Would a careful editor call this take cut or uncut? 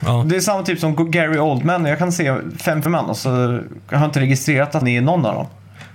cut